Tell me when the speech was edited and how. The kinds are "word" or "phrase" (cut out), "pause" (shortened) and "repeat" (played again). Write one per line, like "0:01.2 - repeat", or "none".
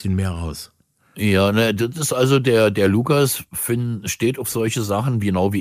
none